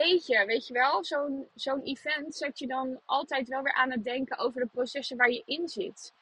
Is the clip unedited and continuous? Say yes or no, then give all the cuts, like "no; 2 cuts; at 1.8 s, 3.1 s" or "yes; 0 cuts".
yes; 0 cuts